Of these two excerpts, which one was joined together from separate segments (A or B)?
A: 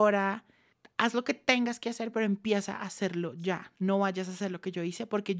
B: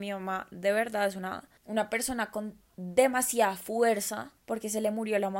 B